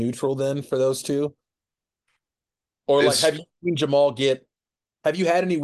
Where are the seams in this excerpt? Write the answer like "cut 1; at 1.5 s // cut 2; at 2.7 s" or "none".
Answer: none